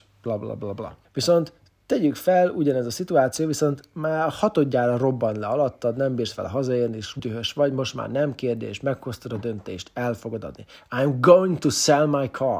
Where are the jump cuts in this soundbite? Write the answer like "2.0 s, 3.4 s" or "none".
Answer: 1.0 s, 7.2 s

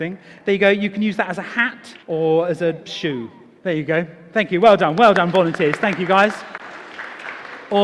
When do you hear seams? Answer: 2.0 s

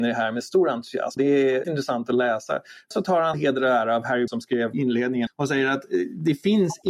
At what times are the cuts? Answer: 1.2 s, 1.6 s, 2.9 s, 3.3 s, 4.3 s, 4.7 s, 5.3 s

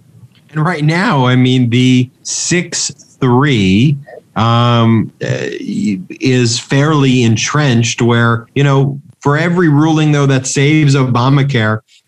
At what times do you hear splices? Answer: 2.1 s, 8.5 s

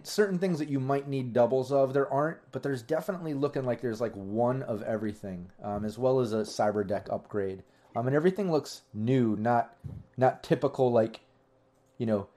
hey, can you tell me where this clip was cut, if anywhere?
none

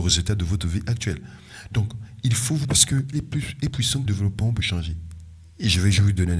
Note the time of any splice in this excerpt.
2.6 s, 3.1 s, 3.7 s, 4.1 s, 4.5 s

